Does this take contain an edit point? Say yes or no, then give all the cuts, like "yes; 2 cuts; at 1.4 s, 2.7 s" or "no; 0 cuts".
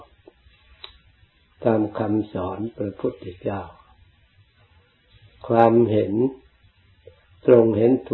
no; 0 cuts